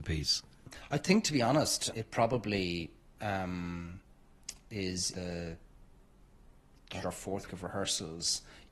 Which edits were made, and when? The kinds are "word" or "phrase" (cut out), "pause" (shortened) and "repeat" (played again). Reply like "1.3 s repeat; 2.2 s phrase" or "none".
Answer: 1.9 s word; 5.1 s word; 7.0 s word; 7.5 s word

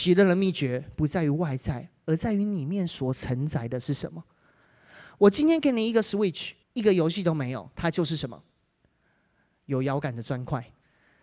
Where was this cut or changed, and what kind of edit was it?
6.6 s pause

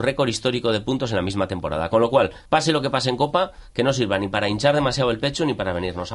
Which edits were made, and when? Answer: 2.5 s pause

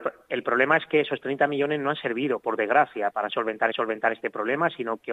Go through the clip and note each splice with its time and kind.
3.1 s word; 3.7 s repeat

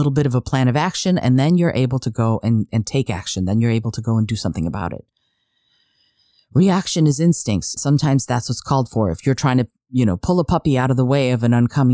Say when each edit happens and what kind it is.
7.8 s word

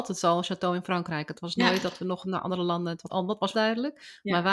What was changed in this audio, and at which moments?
3.1 s word; 3.5 s phrase

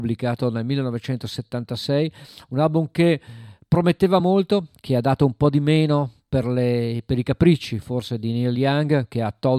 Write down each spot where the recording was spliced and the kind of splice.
none

